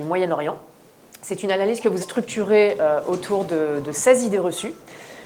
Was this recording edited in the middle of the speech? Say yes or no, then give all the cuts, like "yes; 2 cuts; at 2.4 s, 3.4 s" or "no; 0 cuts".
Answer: yes; 1 cut; at 2.0 s